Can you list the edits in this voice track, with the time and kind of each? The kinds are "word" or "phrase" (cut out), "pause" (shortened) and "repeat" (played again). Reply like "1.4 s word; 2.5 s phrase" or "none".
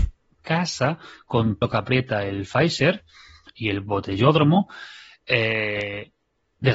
1.6 s word